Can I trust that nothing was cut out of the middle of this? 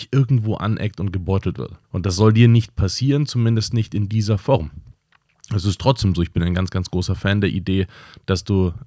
no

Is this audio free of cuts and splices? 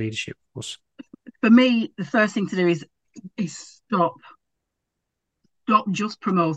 yes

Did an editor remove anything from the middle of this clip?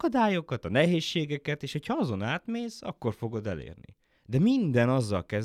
no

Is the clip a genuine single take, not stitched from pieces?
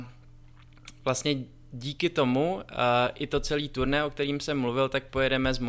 yes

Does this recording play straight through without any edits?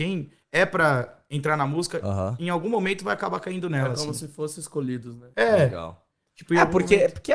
no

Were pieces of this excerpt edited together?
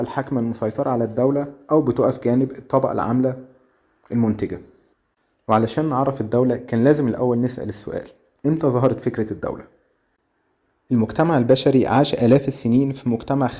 no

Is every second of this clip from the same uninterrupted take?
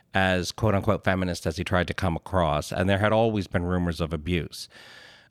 yes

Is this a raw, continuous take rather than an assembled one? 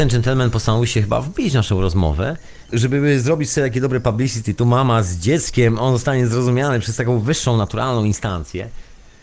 yes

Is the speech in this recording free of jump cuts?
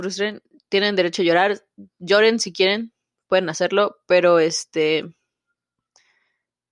yes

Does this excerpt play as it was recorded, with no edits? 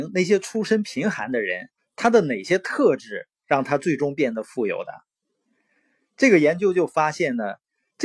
no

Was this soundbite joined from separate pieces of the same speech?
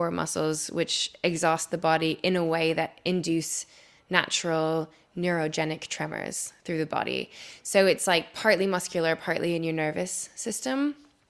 no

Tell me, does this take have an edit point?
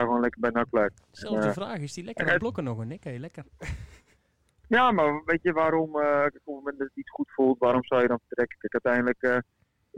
no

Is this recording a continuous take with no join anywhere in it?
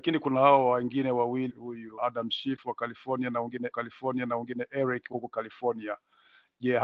no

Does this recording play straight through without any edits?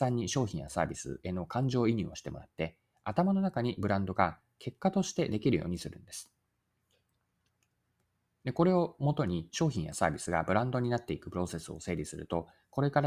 yes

